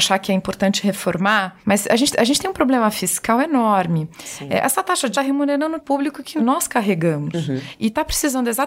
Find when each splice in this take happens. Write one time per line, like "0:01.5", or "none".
0:02.1
0:05.1
0:05.8